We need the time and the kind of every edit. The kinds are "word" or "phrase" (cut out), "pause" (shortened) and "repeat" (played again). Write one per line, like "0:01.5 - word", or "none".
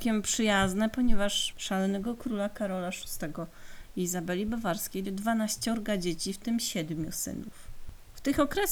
0:01.5 - word
0:05.0 - phrase